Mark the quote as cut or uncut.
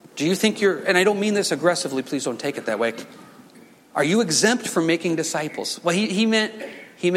uncut